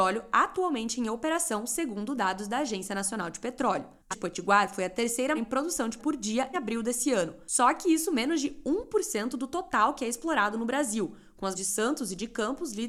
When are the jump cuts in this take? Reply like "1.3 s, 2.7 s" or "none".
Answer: 4.1 s, 5.4 s, 6.0 s, 6.5 s, 11.6 s